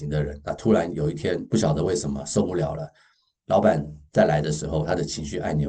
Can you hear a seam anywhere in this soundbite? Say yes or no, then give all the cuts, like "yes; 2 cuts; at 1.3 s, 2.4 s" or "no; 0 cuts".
no; 0 cuts